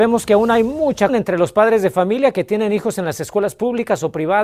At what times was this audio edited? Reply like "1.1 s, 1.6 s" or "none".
1.1 s